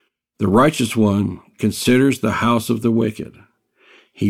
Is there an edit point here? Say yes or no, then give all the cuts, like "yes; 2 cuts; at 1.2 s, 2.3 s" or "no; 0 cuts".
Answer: no; 0 cuts